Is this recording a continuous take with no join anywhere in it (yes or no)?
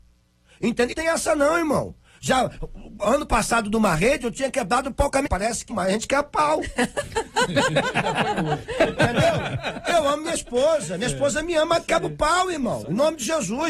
no